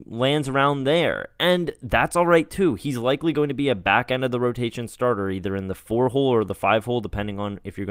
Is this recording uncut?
yes; 0 cuts

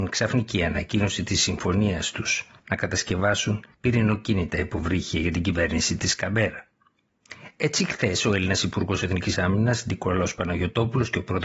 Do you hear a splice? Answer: yes; 2 cuts; at 2.6 s, 3.7 s

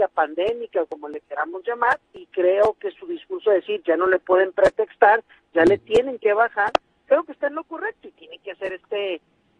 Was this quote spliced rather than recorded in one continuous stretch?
yes; 1 cut; at 2.0 s

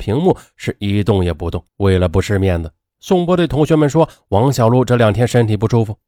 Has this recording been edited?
yes; 1 cut; at 1.7 s

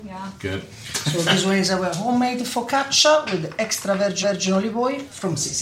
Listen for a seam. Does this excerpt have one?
yes; 1 cut; at 4.2 s

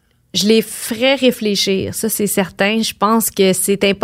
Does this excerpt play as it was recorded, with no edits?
yes; 0 cuts

